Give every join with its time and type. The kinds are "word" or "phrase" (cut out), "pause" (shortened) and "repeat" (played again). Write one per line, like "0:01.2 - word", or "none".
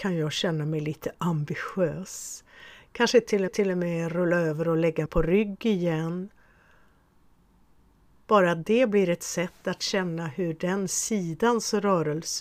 0:03.5 - repeat
0:05.1 - word

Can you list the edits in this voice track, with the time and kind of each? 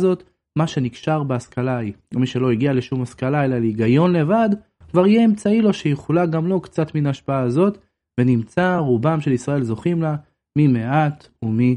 none

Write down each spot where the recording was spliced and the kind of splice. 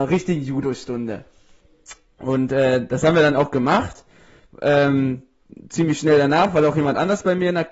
none

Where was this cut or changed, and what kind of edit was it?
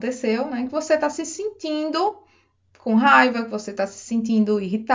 none

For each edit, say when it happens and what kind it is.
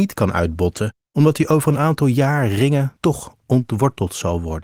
0:01.0 - pause
0:03.0 - pause

